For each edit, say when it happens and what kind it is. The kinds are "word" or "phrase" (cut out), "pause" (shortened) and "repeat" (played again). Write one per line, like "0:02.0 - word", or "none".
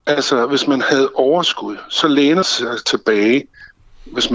0:02.4 - word